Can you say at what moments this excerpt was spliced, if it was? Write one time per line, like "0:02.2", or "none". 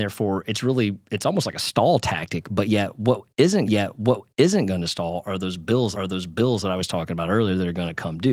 0:03.7
0:05.9